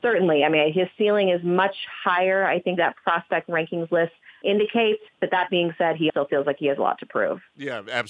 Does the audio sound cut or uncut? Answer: cut